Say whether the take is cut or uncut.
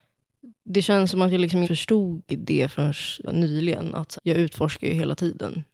cut